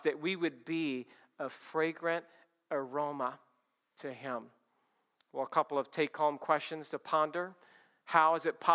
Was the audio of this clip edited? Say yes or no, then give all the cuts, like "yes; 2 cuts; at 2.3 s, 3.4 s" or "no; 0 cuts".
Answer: no; 0 cuts